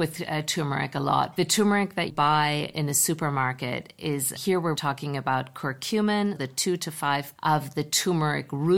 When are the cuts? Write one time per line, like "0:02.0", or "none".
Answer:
0:01.4
0:02.1
0:02.7
0:04.4
0:04.8
0:06.4
0:07.4